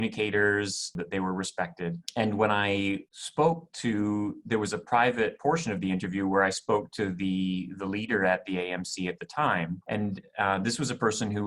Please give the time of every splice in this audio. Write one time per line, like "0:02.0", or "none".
0:03.1